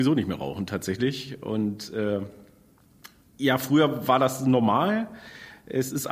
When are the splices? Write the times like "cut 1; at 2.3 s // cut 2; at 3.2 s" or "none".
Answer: none